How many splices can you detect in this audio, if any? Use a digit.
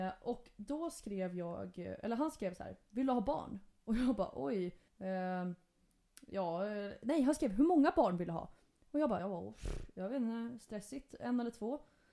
2